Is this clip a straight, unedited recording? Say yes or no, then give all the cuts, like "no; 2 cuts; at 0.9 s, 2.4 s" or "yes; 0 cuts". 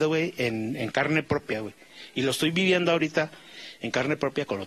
yes; 0 cuts